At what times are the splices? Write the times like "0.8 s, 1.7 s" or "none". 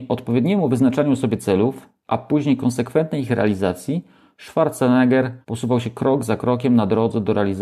5.4 s